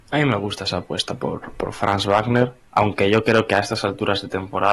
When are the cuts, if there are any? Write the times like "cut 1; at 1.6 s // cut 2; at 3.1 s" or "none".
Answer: cut 1; at 2.6 s